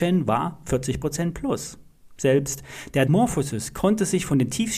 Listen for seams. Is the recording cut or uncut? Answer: cut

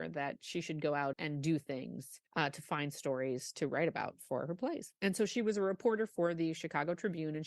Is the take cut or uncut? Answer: cut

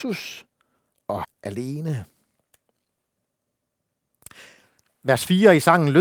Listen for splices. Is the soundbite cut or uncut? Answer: cut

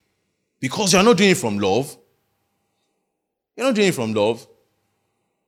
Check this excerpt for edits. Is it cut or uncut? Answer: uncut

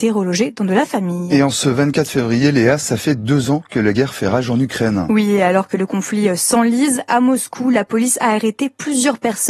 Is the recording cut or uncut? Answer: uncut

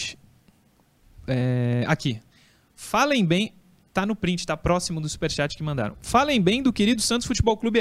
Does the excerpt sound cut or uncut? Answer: uncut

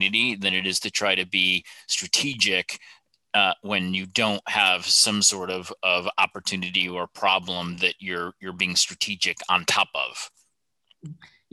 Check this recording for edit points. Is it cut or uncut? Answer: uncut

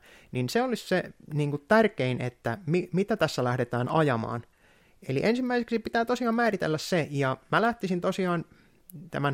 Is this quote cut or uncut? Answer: uncut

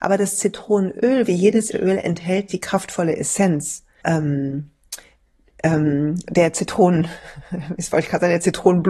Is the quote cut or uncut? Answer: cut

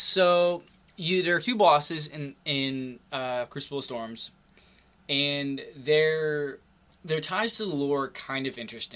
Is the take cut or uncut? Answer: uncut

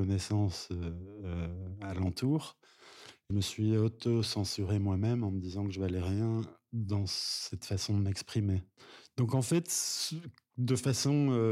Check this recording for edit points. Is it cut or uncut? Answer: cut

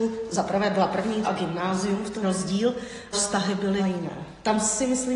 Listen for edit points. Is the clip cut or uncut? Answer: cut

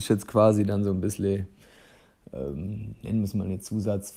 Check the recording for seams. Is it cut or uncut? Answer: uncut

